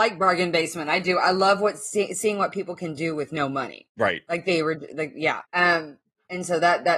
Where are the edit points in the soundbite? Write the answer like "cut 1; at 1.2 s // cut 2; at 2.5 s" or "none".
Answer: cut 1; at 5.4 s